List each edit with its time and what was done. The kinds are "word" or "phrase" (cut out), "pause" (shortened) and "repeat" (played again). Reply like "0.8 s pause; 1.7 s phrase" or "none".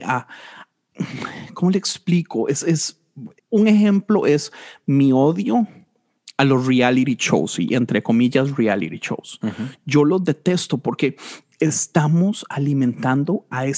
3.4 s pause